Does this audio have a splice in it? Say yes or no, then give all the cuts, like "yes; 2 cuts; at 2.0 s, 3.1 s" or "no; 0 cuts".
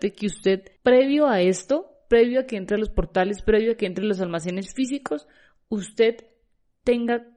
no; 0 cuts